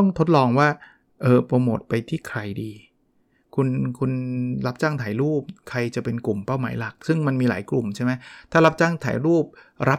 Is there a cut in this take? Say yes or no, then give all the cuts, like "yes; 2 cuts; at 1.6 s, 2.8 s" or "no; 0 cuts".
no; 0 cuts